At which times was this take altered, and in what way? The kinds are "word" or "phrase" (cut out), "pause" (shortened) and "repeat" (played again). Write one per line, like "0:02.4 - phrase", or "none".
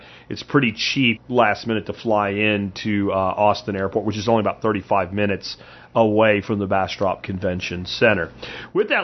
0:01.2 - word